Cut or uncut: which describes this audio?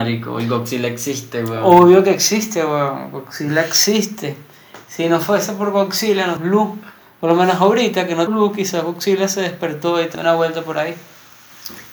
cut